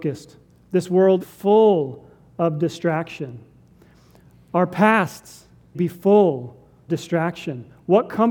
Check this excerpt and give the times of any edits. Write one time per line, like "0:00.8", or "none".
0:01.2
0:05.7
0:06.9